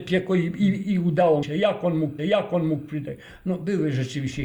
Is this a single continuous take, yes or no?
no